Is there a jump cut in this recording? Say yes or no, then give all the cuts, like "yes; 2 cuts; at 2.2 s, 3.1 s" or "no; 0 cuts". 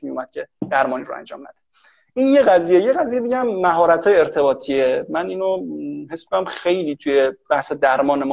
no; 0 cuts